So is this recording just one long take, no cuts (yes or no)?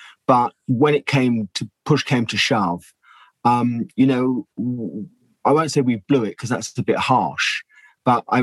yes